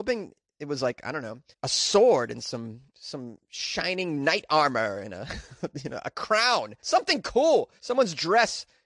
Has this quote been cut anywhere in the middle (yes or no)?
yes